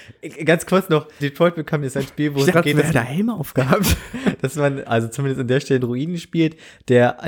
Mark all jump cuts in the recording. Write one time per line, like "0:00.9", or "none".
0:01.2
0:01.8
0:02.5
0:02.9
0:04.8
0:05.8